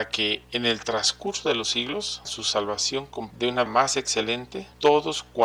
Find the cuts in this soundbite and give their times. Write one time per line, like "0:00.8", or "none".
0:02.2
0:03.3
0:03.7